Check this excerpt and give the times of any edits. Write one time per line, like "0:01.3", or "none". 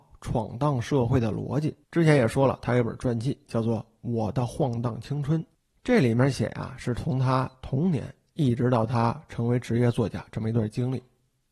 0:01.8
0:05.7